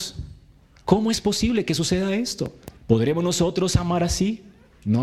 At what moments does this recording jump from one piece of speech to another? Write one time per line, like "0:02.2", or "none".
0:02.8